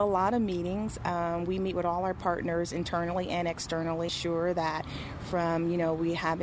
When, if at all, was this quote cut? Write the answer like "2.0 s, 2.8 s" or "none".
4.1 s

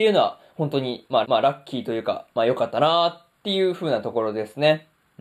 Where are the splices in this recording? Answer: 1.2 s

